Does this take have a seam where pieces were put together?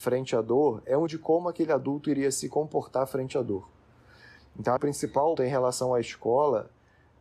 yes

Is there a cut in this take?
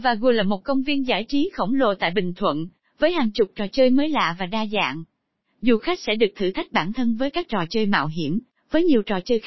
no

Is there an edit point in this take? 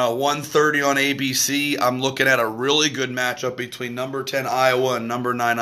no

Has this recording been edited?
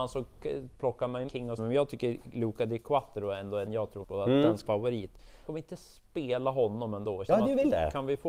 yes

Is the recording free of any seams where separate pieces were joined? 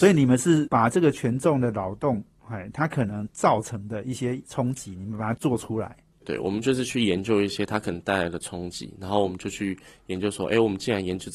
yes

